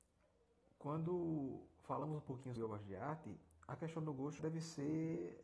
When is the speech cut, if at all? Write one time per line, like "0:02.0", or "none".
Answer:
0:02.6
0:04.4